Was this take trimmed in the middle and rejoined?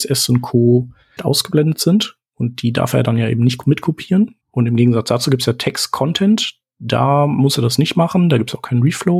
yes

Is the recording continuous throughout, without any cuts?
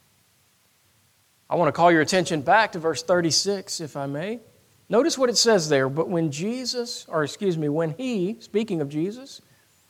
yes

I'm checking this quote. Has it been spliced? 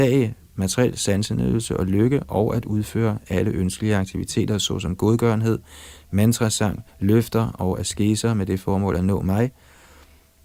yes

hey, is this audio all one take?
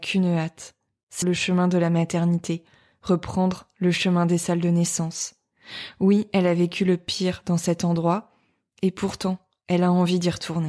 no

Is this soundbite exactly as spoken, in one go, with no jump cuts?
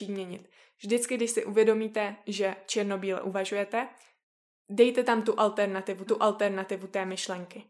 no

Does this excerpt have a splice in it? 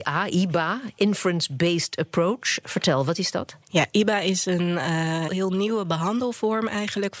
yes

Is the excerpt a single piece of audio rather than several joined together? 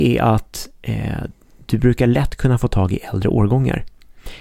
yes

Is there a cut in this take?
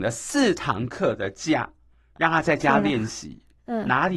no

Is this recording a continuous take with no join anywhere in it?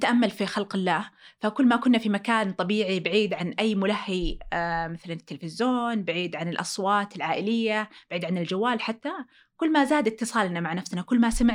yes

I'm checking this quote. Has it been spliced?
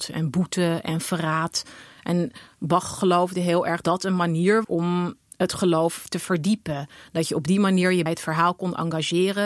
yes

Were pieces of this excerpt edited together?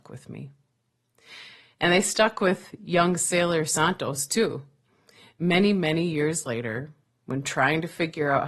no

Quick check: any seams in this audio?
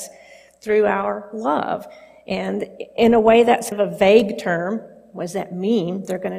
yes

